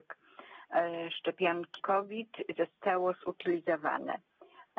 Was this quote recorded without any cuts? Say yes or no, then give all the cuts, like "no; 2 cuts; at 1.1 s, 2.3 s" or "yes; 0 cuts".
no; 1 cut; at 1.8 s